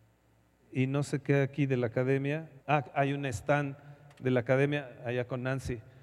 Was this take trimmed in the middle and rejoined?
yes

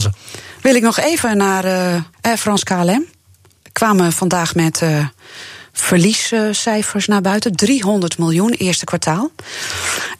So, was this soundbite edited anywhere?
yes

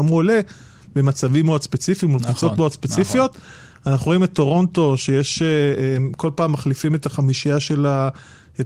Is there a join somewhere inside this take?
no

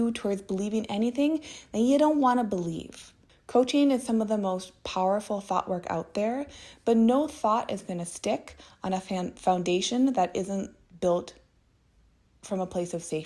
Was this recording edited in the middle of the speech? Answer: no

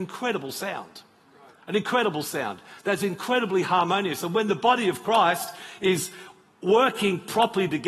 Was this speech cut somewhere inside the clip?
no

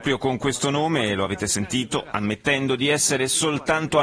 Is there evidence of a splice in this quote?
no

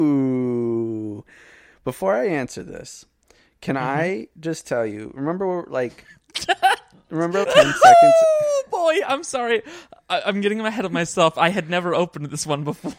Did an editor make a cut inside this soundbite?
yes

